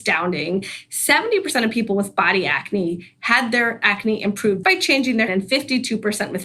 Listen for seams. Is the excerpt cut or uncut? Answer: cut